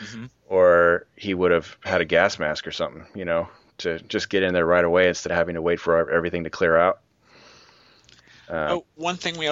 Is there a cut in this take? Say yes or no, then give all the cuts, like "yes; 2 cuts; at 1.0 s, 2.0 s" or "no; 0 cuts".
no; 0 cuts